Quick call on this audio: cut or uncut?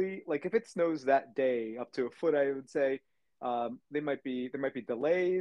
uncut